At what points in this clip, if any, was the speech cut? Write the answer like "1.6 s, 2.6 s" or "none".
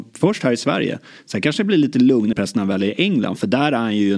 2.3 s